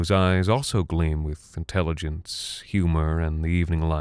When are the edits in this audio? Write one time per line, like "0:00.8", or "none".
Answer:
none

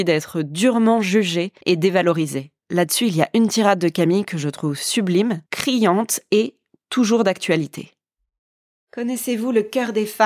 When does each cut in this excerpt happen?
0:01.6
0:02.6
0:05.5
0:06.7

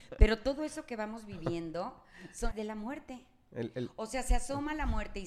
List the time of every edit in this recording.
0:02.5

